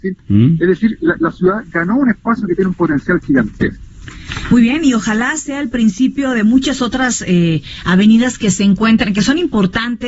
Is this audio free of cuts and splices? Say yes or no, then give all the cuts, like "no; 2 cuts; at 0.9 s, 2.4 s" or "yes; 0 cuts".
yes; 0 cuts